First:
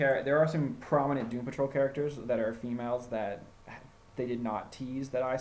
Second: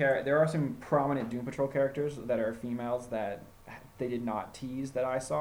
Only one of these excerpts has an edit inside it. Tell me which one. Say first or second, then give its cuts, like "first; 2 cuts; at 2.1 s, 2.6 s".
second; 1 cut; at 3.9 s